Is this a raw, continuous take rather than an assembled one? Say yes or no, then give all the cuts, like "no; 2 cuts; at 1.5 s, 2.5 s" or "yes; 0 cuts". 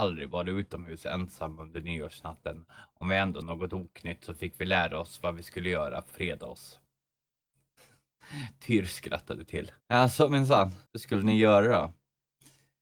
no; 4 cuts; at 3.4 s, 6.1 s, 9.8 s, 10.9 s